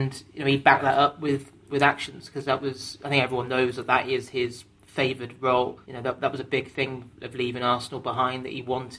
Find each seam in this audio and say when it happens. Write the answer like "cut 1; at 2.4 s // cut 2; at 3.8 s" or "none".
cut 1; at 1.7 s // cut 2; at 5.8 s